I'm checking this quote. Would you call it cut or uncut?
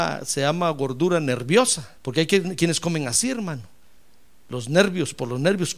cut